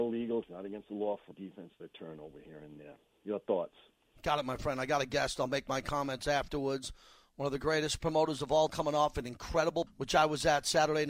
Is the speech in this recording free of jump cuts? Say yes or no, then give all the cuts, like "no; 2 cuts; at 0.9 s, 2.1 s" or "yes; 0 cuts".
no; 4 cuts; at 1.3 s, 1.8 s, 8.7 s, 9.9 s